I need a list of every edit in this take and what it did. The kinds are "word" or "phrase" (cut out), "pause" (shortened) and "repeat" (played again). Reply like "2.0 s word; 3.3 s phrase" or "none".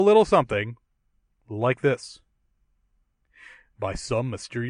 none

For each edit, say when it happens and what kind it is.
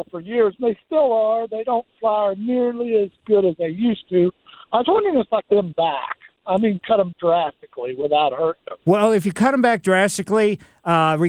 5.4 s phrase; 7.1 s word; 8.8 s pause

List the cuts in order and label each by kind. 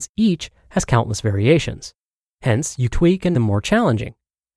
2.9 s word; 3.3 s word

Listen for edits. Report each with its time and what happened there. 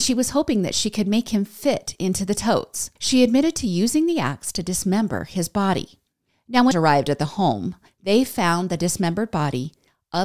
3.0 s pause; 6.3 s pause; 6.7 s word

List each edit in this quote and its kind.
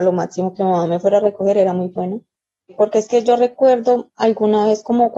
none

